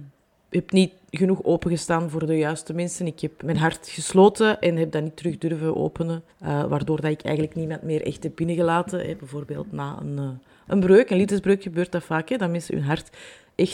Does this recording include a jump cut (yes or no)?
yes